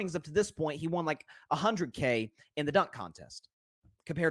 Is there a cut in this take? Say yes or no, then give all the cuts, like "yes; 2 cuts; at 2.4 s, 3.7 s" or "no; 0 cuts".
no; 0 cuts